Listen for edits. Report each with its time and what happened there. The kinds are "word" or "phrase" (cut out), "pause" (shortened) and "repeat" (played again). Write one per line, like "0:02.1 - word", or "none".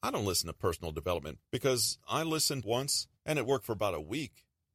0:01.4 - word
0:02.6 - phrase
0:03.2 - pause